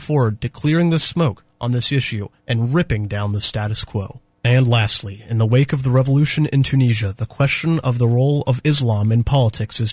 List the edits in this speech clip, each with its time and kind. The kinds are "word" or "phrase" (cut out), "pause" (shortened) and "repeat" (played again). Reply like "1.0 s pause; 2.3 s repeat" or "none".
2.4 s pause; 4.3 s pause